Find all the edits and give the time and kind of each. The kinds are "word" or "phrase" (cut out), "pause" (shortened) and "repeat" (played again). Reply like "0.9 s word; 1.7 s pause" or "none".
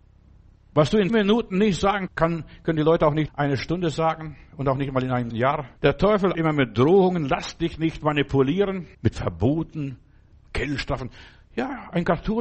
1.1 s word; 2.1 s word; 3.3 s word; 5.3 s word; 5.8 s pause; 6.3 s word; 8.9 s pause

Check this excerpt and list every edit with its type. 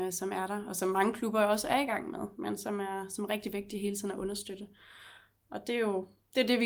none

